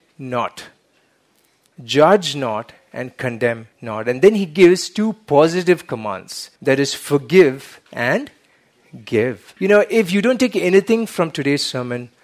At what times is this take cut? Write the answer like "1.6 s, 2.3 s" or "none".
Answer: 3.7 s, 6.6 s, 7.8 s, 9.6 s